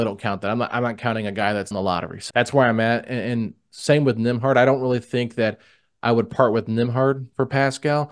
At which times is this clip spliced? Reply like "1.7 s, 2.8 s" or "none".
1.7 s, 2.3 s